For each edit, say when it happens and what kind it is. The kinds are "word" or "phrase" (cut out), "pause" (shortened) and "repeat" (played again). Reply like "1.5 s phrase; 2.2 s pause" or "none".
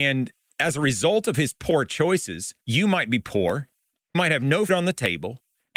2.6 s pause; 4.1 s word; 4.7 s word